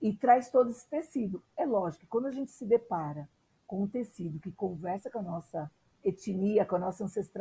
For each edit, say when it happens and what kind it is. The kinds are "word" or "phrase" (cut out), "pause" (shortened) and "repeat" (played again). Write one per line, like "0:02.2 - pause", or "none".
none